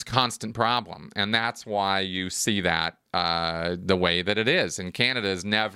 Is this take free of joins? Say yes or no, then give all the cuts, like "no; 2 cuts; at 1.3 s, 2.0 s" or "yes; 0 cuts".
yes; 0 cuts